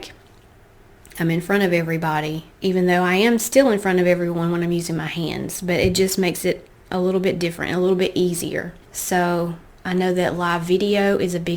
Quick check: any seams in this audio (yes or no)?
yes